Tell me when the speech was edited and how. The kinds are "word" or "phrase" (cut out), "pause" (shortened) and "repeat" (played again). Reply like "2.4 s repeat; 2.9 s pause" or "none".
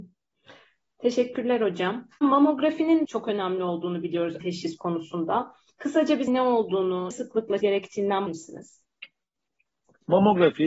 3.0 s word; 4.4 s word; 6.3 s word; 7.1 s word; 7.6 s word; 8.3 s word